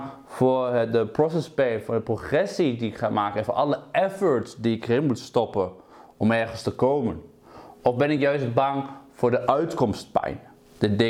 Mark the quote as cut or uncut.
uncut